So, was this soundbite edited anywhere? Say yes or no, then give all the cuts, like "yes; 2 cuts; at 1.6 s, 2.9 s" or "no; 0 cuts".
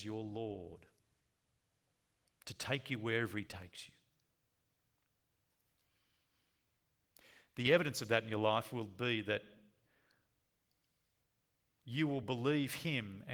no; 0 cuts